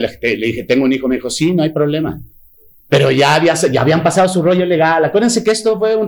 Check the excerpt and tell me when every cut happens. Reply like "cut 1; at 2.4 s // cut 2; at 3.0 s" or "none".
none